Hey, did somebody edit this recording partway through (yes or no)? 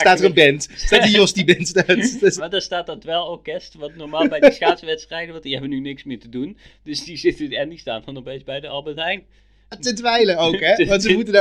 yes